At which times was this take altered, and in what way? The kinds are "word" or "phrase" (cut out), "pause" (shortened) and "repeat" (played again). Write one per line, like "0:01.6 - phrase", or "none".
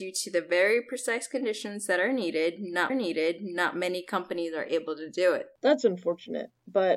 0:02.9 - repeat